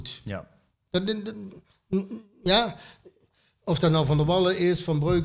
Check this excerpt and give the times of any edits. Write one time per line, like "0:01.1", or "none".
none